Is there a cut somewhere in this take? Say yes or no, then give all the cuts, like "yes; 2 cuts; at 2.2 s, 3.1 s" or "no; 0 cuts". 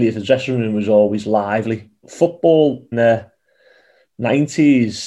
yes; 2 cuts; at 2.0 s, 2.9 s